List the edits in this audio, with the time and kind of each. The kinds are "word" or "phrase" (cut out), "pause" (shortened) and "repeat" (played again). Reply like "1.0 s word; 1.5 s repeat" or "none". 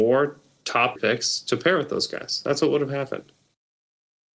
1.0 s phrase